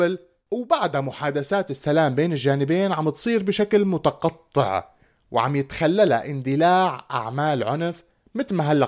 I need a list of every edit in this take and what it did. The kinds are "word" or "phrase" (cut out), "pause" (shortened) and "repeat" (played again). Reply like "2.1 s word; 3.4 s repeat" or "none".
none